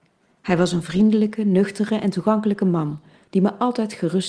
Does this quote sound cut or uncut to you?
uncut